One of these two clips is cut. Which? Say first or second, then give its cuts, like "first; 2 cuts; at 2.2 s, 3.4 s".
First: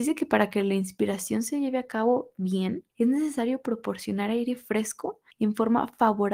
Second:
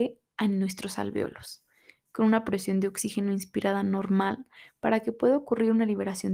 first; 2 cuts; at 2.9 s, 5.3 s